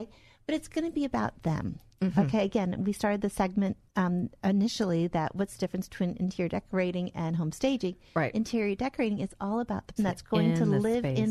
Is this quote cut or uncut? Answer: cut